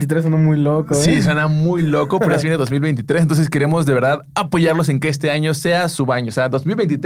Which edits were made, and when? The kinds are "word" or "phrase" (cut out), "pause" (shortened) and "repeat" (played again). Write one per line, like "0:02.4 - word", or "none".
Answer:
none